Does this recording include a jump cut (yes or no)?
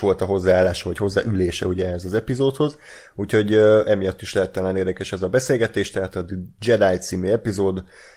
no